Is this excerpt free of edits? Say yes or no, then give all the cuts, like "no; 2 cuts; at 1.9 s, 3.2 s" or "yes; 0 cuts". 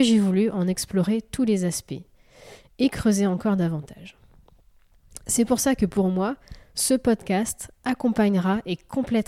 yes; 0 cuts